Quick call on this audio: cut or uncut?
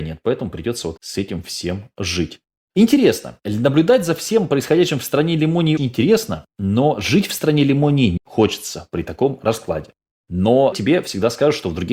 cut